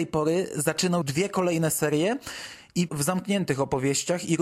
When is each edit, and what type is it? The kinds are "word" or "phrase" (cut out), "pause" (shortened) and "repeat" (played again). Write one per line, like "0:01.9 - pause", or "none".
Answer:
0:01.0 - word
0:02.9 - phrase